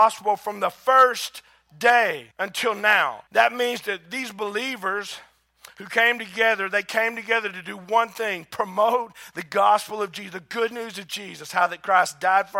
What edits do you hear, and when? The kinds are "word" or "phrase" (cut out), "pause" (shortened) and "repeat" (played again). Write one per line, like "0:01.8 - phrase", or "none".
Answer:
0:02.3 - pause
0:03.3 - pause